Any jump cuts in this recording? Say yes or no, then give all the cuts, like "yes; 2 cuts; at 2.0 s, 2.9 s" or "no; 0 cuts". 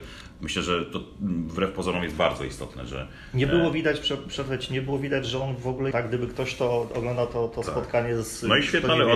yes; 1 cut; at 5.9 s